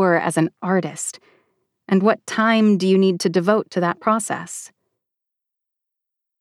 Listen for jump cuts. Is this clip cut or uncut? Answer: uncut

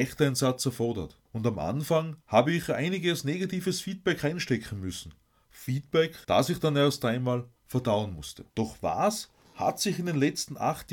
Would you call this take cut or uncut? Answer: cut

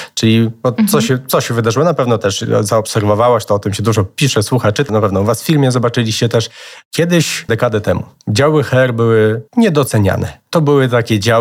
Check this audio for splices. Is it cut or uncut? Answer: cut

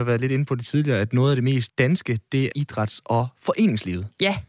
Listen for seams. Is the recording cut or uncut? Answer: cut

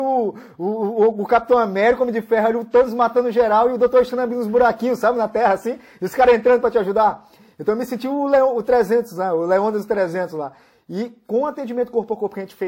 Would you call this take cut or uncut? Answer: uncut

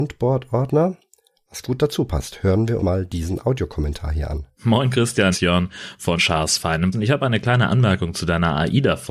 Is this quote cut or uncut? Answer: cut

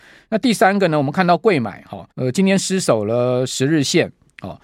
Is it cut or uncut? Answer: cut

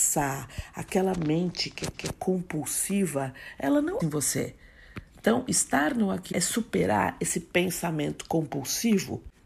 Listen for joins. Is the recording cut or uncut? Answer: cut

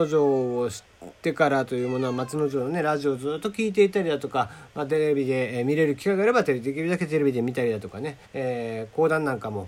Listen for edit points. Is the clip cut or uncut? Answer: cut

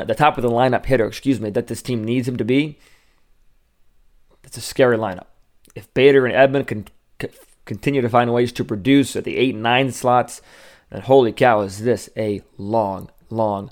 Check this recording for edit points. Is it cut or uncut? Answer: uncut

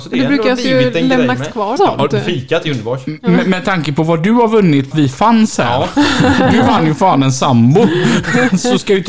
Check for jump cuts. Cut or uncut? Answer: cut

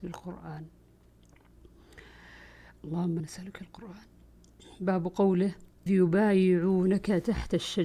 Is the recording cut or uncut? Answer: cut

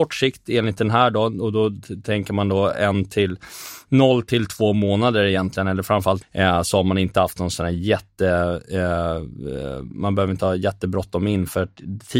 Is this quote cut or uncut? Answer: cut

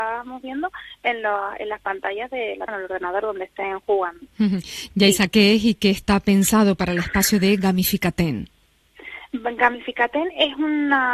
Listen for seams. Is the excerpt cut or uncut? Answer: cut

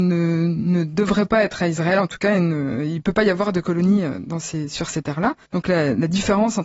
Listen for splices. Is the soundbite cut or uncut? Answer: cut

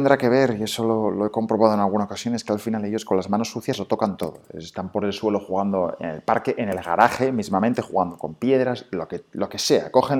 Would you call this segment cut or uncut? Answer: uncut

